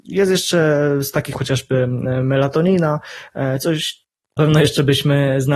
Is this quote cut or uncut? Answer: cut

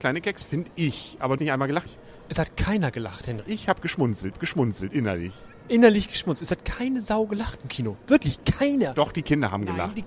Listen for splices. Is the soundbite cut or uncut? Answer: cut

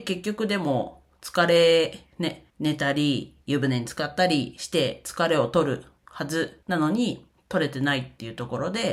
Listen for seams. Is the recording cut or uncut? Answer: cut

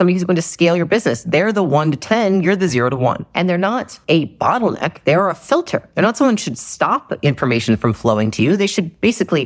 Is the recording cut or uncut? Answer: uncut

